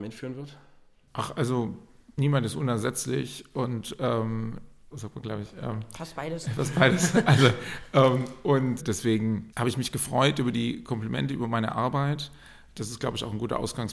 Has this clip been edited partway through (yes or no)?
yes